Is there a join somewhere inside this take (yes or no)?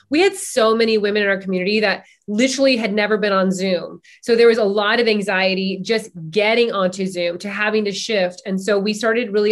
no